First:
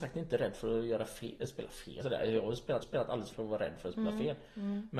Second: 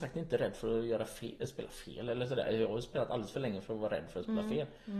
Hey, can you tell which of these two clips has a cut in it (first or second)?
first